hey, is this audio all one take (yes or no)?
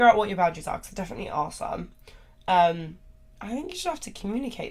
yes